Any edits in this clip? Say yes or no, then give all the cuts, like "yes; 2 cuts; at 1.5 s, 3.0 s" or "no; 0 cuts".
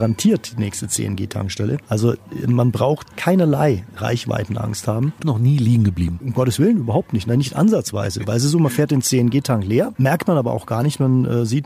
yes; 2 cuts; at 3.0 s, 5.2 s